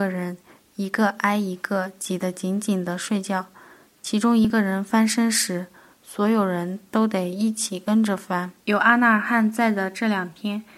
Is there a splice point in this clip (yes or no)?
yes